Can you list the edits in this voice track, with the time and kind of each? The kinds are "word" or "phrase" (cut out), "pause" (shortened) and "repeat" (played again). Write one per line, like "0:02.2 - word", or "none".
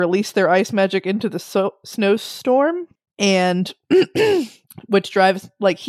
none